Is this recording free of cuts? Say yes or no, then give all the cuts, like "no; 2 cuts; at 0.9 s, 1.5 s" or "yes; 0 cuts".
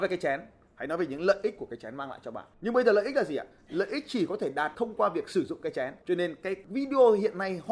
no; 3 cuts; at 2.5 s, 4.7 s, 6.0 s